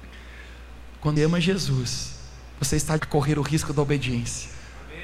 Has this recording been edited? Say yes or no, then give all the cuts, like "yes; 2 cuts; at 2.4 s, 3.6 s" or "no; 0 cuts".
yes; 2 cuts; at 1.2 s, 3.0 s